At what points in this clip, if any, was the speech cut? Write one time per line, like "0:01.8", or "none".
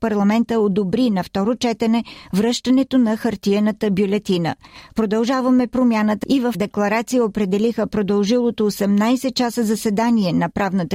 0:06.2
0:06.5